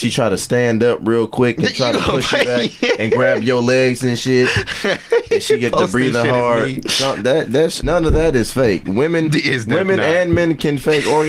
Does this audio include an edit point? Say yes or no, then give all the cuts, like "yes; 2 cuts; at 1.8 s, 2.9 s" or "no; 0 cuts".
yes; 1 cut; at 7.8 s